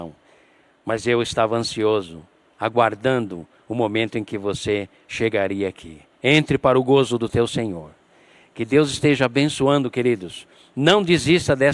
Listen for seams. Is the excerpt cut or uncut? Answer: uncut